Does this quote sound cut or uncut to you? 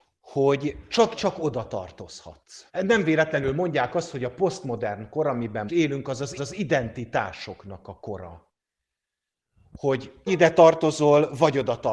cut